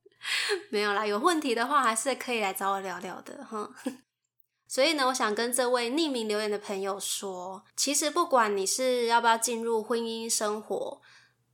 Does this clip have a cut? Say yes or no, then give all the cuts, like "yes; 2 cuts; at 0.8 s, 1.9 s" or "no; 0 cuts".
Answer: yes; 2 cuts; at 4.0 s, 7.7 s